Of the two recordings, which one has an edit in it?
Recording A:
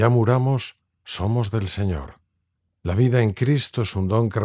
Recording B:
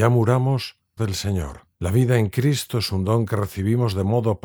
B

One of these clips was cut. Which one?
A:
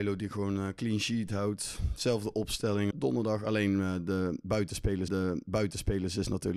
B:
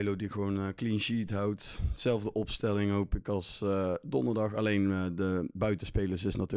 A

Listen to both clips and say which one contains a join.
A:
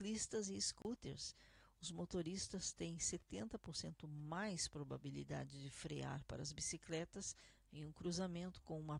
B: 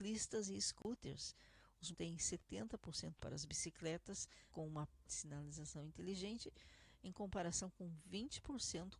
B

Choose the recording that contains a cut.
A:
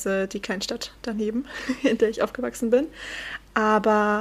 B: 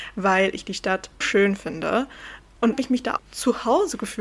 B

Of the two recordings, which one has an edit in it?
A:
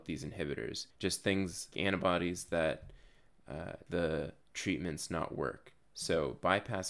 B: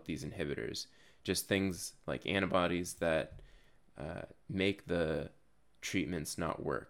A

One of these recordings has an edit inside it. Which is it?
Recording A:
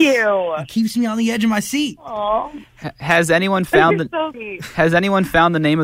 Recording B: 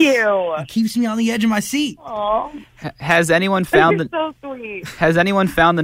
A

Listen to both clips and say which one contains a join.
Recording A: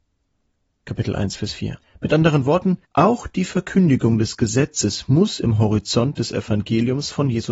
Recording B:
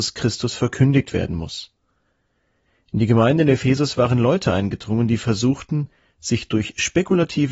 A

